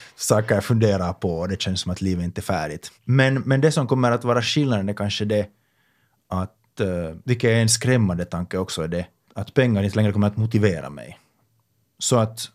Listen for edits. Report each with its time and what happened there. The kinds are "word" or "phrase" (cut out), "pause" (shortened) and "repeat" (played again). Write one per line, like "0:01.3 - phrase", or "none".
0:03.0 - pause
0:07.2 - pause
0:09.3 - word